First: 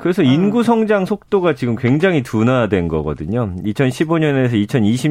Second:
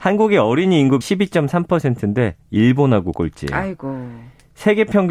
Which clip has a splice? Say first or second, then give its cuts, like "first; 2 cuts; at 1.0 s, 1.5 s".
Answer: second; 2 cuts; at 1.0 s, 3.1 s